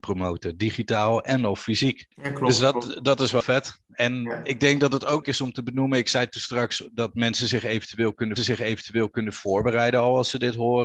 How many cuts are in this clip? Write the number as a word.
four